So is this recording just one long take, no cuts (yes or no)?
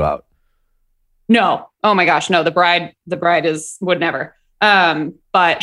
yes